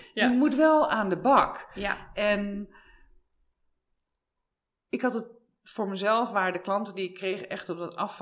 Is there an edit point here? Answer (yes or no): no